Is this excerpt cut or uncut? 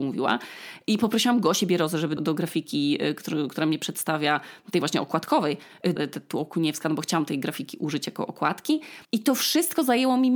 cut